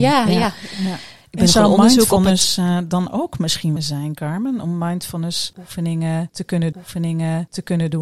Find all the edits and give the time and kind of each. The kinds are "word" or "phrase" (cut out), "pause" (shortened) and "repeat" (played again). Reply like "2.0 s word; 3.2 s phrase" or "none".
3.8 s phrase; 6.7 s repeat